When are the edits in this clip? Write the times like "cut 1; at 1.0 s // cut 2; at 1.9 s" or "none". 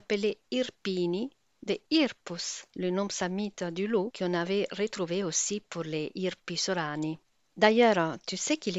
none